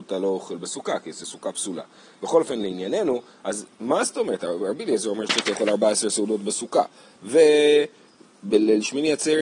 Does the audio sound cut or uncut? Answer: uncut